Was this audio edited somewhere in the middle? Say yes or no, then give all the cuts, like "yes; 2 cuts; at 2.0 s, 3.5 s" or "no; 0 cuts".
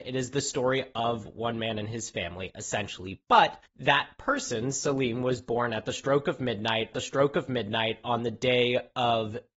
yes; 1 cut; at 6.9 s